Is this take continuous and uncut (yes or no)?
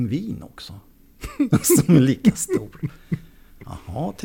yes